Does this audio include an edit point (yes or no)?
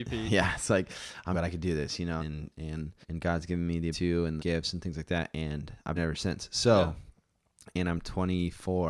yes